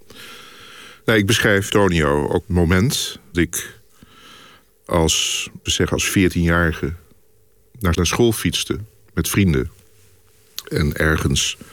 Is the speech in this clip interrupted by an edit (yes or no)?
yes